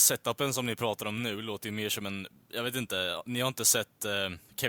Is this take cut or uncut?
uncut